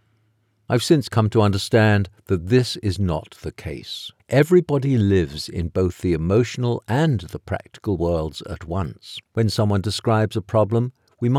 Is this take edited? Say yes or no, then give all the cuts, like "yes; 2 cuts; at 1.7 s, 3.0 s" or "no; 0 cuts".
yes; 2 cuts; at 4.2 s, 9.3 s